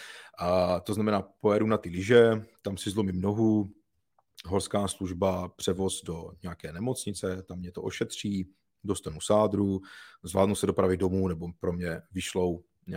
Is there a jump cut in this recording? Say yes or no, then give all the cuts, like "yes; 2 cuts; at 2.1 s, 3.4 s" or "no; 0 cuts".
no; 0 cuts